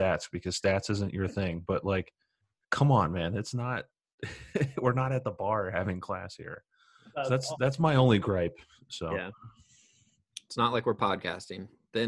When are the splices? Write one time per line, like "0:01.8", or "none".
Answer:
none